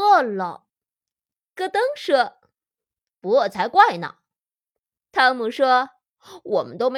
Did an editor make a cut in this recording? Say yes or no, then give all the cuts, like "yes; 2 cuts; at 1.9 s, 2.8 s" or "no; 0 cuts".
no; 0 cuts